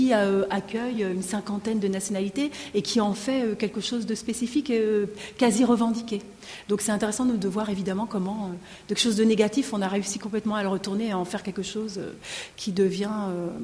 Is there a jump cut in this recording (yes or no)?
no